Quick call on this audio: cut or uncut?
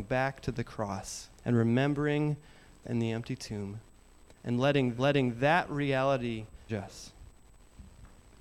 cut